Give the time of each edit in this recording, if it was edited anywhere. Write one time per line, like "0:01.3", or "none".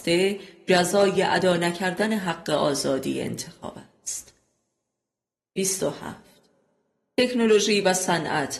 none